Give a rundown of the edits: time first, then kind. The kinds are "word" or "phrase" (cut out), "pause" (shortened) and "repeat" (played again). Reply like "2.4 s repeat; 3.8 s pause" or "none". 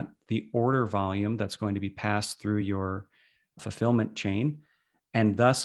none